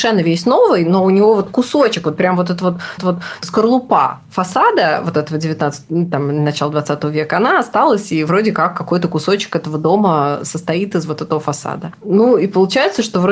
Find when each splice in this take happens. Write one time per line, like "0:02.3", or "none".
0:03.0